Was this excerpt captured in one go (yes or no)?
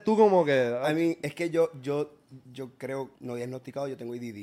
no